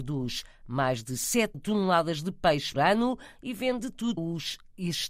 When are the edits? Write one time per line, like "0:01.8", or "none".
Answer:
0:01.5
0:02.7
0:03.8
0:04.2